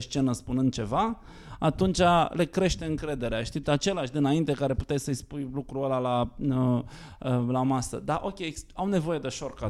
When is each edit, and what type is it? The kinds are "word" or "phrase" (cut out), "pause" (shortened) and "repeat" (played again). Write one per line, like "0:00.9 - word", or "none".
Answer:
0:03.6 - word